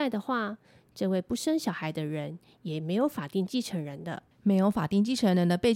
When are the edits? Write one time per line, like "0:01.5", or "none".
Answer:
0:04.3